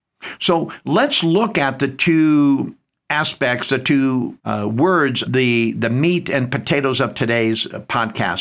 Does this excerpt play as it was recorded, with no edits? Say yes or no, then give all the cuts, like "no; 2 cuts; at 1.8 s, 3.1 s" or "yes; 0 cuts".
no; 2 cuts; at 4.4 s, 5.2 s